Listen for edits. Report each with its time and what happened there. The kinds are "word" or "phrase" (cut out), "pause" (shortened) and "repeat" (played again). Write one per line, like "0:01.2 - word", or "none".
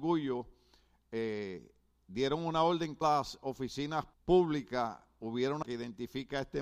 0:03.0 - phrase
0:04.1 - pause
0:05.6 - word